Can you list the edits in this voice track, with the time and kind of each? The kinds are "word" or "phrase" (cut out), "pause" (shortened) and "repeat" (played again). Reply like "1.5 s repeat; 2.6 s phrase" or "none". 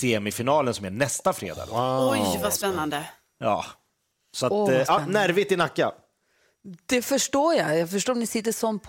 none